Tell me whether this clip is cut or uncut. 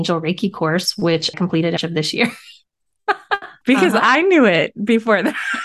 cut